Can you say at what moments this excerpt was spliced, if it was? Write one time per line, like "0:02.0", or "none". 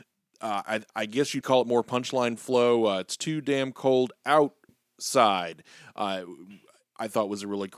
0:01.4